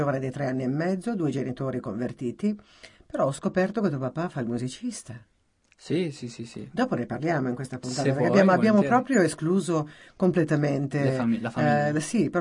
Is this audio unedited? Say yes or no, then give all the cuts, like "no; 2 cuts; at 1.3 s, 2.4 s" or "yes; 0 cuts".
yes; 0 cuts